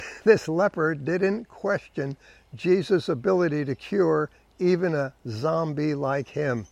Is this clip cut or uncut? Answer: uncut